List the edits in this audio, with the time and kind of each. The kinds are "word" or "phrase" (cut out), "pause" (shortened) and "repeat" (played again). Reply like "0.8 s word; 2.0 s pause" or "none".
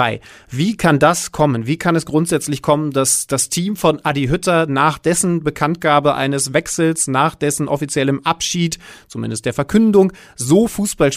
none